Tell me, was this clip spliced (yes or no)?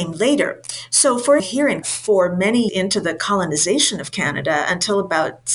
yes